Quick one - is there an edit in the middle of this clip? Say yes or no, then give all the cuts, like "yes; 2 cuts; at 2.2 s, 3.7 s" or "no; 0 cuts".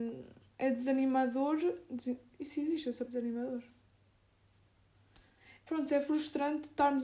yes; 1 cut; at 3.1 s